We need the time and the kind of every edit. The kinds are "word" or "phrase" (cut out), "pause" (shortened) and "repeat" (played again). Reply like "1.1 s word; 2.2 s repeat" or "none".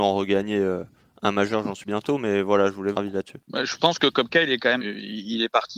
1.8 s word; 2.9 s word; 4.8 s word